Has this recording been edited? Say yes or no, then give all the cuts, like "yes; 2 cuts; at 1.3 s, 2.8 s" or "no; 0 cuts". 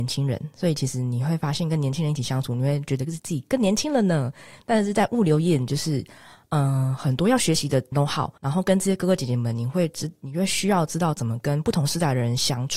yes; 2 cuts; at 7.9 s, 8.4 s